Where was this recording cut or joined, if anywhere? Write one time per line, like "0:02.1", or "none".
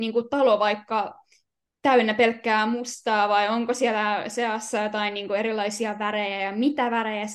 none